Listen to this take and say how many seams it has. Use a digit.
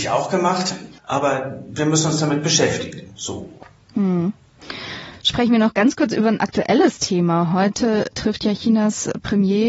1